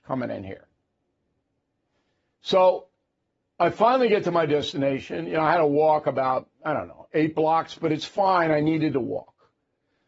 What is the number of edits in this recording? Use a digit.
1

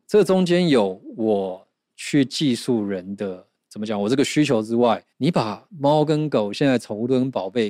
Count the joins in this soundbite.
1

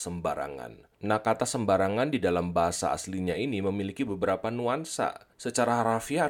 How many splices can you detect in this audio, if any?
2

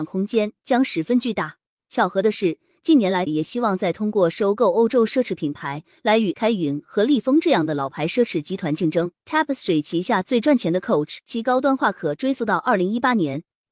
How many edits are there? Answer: 4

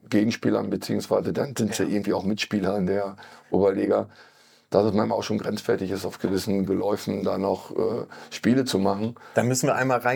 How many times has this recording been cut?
0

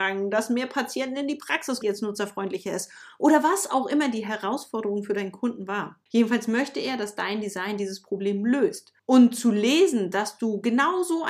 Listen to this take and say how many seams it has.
3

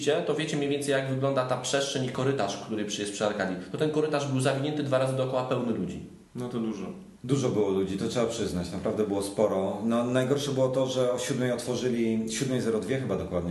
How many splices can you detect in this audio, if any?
2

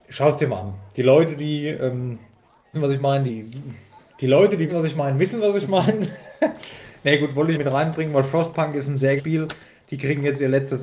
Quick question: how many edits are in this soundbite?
5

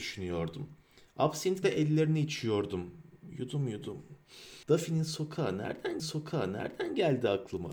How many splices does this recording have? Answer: 3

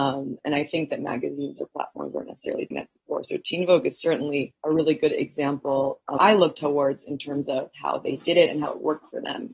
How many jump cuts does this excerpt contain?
3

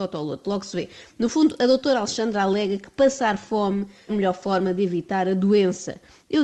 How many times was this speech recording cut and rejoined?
1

